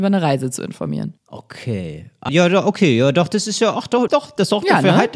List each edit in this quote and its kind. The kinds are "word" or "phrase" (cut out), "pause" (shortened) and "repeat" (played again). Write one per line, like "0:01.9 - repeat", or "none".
0:02.3 - word
0:04.1 - word